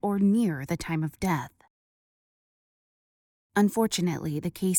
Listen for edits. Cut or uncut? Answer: uncut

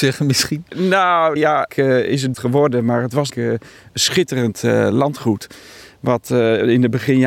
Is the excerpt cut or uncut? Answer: cut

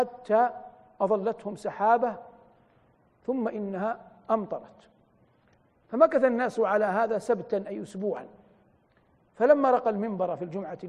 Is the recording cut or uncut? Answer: uncut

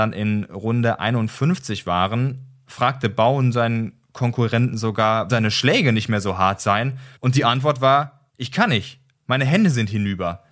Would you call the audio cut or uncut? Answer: cut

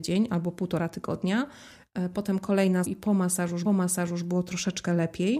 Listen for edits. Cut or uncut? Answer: cut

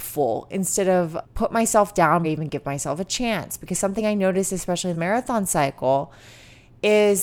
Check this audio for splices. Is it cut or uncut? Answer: cut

